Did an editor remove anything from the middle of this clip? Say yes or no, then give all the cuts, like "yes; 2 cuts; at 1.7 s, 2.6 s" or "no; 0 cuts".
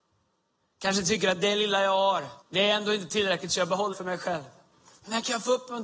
yes; 3 cuts; at 2.4 s, 3.9 s, 4.7 s